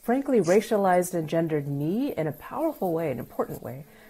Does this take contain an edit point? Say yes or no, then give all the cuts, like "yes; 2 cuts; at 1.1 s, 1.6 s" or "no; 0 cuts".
no; 0 cuts